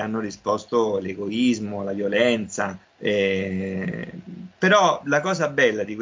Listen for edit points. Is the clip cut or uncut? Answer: cut